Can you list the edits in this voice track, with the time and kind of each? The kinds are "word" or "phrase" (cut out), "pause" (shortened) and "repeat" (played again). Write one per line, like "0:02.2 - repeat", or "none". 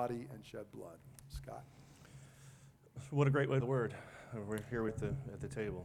0:03.6 - word
0:04.9 - word